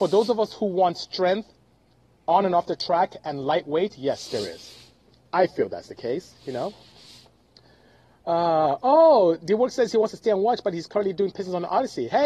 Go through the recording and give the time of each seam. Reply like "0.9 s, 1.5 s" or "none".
none